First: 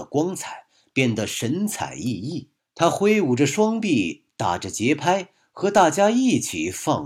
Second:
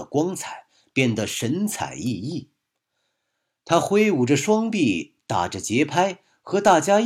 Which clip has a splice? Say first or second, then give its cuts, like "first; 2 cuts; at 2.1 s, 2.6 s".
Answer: first; 1 cut; at 2.6 s